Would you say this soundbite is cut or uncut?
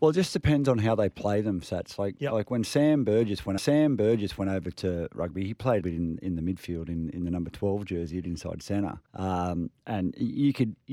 cut